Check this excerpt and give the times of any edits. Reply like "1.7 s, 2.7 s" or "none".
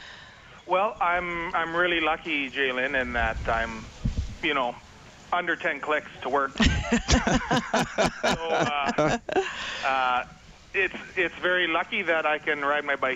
none